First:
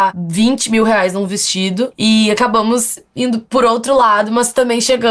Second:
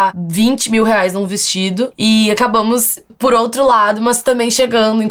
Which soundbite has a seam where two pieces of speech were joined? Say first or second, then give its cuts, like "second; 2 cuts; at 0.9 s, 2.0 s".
second; 1 cut; at 3.1 s